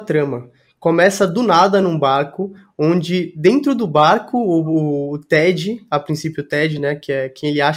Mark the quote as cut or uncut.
uncut